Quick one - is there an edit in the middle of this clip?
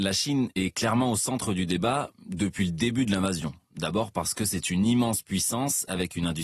no; 0 cuts

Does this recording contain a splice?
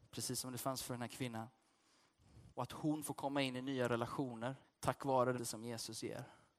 yes; 3 cuts; at 2.5 s, 4.6 s, 5.4 s

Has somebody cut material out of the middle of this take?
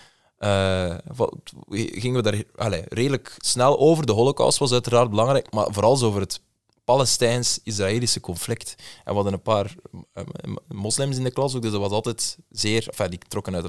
no; 0 cuts

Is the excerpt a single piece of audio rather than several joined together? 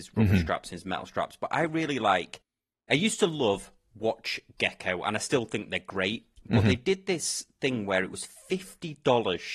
yes; 0 cuts

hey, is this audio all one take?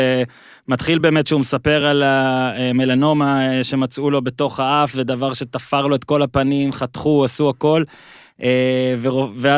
yes; 0 cuts

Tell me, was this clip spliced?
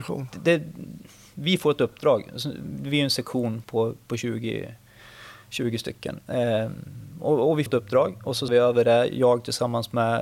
yes; 3 cuts; at 3.6 s, 7.7 s, 8.5 s

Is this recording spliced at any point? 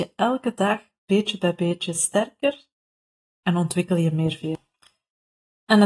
no; 0 cuts

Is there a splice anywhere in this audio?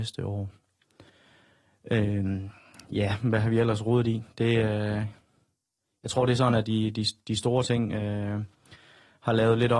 no; 0 cuts

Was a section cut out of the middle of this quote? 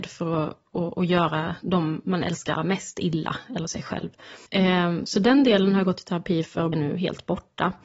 yes; 3 cuts; at 2.6 s, 4.5 s, 6.7 s

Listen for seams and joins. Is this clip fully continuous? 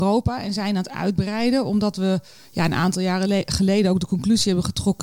yes; 0 cuts

